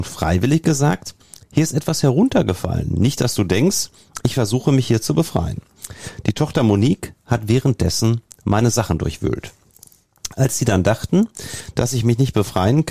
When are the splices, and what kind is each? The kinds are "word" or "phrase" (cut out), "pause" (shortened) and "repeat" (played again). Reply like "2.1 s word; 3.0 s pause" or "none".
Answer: none